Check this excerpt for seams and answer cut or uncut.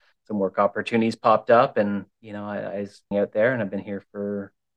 cut